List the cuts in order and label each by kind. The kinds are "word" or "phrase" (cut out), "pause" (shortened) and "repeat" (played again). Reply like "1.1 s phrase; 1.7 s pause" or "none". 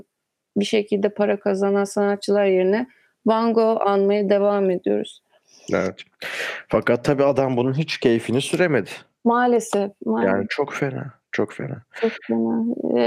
none